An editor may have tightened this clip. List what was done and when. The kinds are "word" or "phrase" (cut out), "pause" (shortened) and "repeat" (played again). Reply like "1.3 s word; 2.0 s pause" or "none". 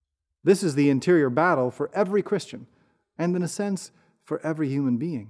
none